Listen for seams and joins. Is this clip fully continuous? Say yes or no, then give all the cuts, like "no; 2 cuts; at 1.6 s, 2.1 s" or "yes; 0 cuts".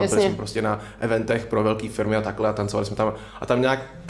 yes; 0 cuts